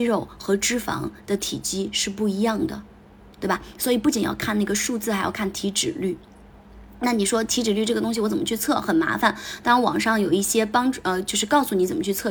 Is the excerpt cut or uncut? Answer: uncut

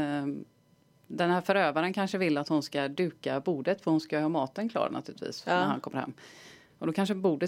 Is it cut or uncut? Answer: uncut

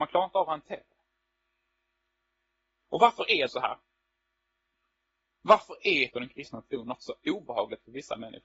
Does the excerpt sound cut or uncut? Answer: cut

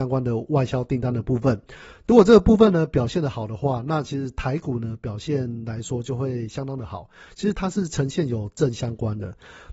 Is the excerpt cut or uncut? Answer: uncut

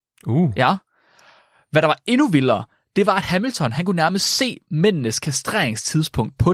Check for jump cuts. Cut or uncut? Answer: uncut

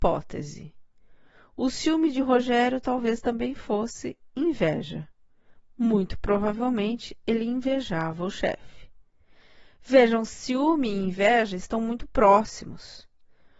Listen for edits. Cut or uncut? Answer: uncut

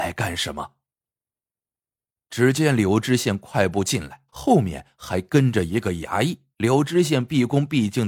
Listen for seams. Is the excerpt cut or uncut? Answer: cut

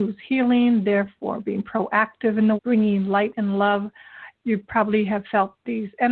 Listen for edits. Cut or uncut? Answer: cut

